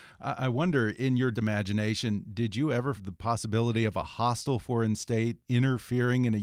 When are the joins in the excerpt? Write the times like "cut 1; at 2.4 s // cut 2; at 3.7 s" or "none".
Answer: cut 1; at 1.3 s // cut 2; at 3.0 s